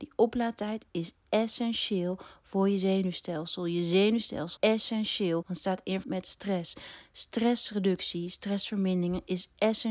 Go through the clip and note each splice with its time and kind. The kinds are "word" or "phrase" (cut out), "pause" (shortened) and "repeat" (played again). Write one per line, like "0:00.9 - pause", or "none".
0:04.6 - word
0:05.4 - word
0:06.0 - word